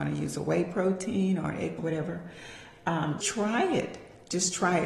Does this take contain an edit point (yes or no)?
yes